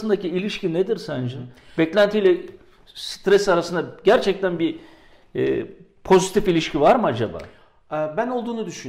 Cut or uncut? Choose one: uncut